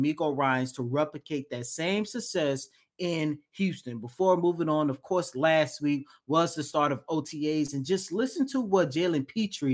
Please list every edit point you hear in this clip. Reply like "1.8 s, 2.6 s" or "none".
none